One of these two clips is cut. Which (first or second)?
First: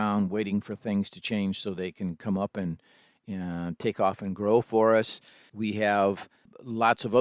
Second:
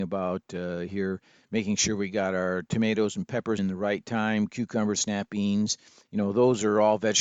second